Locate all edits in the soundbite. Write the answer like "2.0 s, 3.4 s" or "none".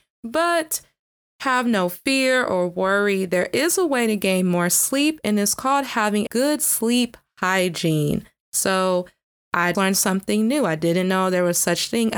6.3 s, 9.7 s